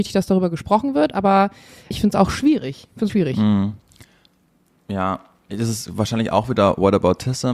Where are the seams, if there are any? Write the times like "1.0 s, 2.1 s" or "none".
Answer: 1.9 s, 3.1 s